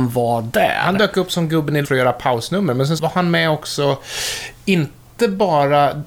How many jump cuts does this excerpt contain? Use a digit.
2